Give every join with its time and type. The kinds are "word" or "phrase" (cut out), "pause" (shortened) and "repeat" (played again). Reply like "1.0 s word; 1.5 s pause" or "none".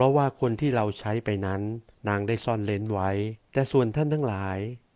1.9 s pause; 3.4 s pause